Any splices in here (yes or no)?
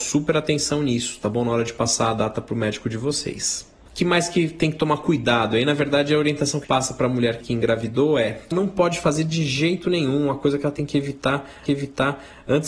yes